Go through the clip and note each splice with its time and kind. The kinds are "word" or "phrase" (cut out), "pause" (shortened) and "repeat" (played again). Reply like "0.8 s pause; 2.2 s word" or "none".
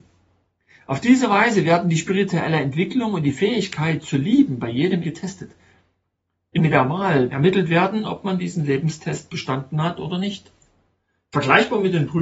5.0 s word; 6.6 s word; 7.3 s phrase